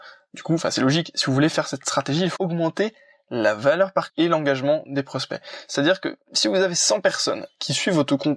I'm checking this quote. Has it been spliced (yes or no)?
yes